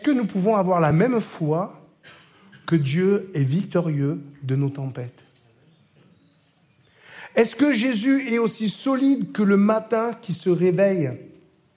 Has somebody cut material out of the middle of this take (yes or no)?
no